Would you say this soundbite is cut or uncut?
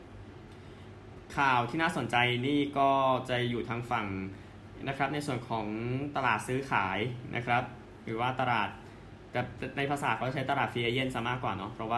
cut